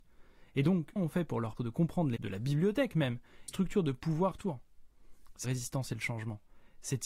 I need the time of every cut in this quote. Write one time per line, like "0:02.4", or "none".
0:01.0
0:01.6
0:02.2
0:03.5
0:04.3
0:05.4